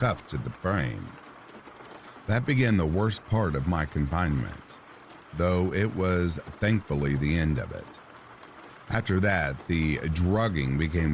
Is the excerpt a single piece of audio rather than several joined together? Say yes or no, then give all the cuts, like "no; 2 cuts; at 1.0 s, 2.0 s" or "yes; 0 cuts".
yes; 0 cuts